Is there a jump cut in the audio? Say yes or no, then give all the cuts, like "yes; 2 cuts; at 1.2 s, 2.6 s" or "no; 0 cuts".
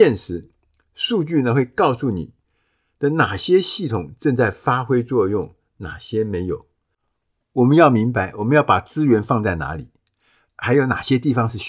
no; 0 cuts